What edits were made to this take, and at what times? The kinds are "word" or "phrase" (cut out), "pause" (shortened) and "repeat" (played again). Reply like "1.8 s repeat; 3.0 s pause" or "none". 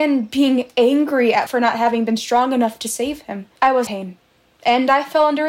1.5 s word; 3.6 s pause; 3.9 s word